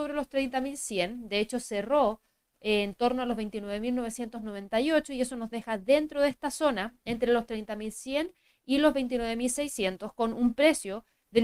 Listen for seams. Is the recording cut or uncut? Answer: uncut